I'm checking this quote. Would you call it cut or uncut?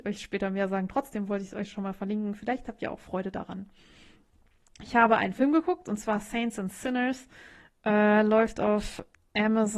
uncut